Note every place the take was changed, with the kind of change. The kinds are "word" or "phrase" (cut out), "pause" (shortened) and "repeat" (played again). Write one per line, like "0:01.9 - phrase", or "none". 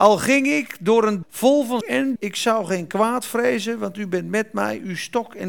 0:01.2 - word
0:01.8 - word
0:02.2 - word